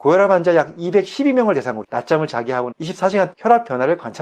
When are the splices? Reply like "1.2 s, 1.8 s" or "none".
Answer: 1.8 s, 2.7 s, 3.3 s